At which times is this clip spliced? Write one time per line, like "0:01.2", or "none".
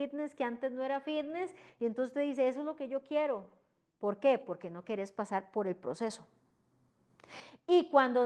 none

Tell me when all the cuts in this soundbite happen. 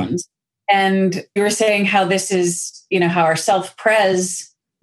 0:01.4

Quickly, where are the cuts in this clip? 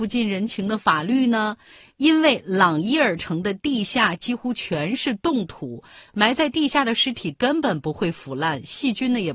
none

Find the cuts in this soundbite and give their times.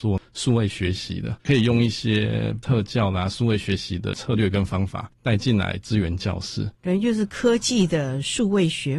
0:01.4
0:06.7

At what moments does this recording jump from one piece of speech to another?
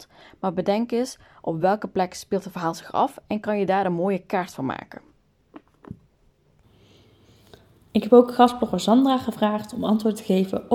none

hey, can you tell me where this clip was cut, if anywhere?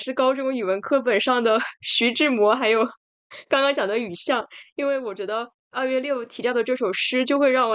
0:05.6

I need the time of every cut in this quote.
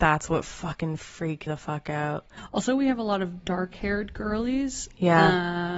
0:01.5

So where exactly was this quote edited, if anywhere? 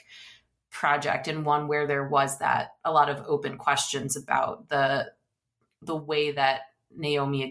none

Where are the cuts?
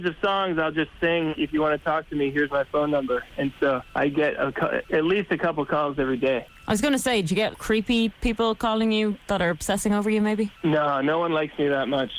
0:01.3
0:07.5

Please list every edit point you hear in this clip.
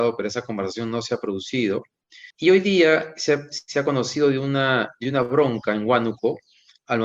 0:02.3

